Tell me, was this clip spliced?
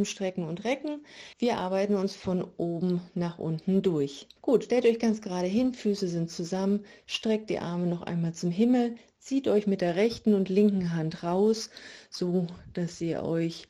yes; 2 cuts; at 1.3 s, 4.4 s

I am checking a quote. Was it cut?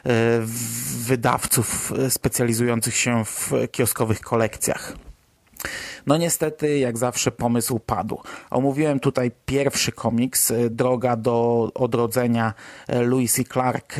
no; 0 cuts

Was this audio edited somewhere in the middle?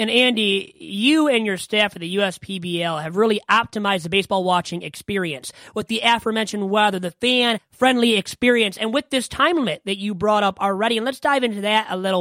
no; 0 cuts

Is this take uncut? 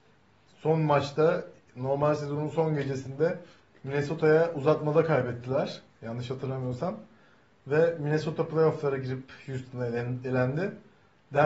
yes; 0 cuts

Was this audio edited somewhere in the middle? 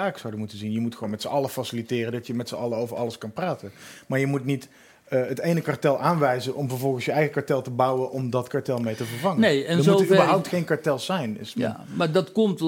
no; 0 cuts

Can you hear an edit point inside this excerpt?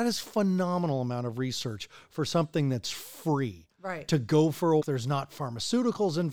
yes; 1 cut; at 4.8 s

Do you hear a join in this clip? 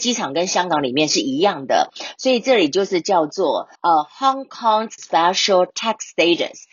yes; 2 cuts; at 3.8 s, 5.0 s

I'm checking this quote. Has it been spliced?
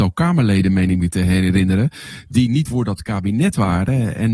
yes; 1 cut; at 2.6 s

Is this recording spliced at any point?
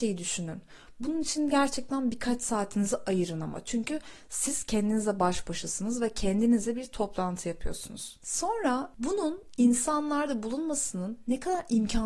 no; 0 cuts

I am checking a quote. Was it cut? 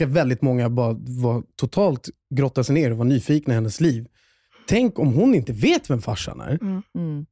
no; 0 cuts

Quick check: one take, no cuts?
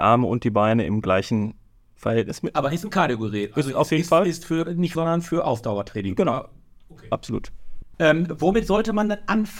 no; 1 cut; at 5.0 s

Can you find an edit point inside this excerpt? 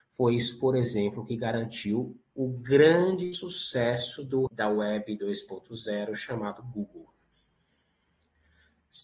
yes; 1 cut; at 4.5 s

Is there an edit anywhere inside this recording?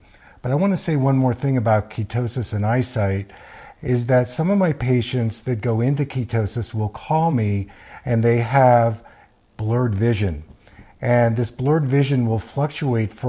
no; 0 cuts

